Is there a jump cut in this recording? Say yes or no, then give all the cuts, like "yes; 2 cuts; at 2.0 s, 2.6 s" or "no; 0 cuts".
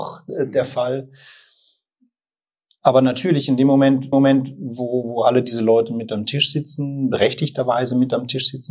yes; 1 cut; at 4.1 s